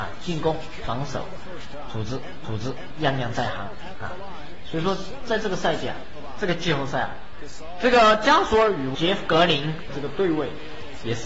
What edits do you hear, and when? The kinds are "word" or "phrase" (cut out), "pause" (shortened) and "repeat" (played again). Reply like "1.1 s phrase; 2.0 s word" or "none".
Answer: 2.4 s repeat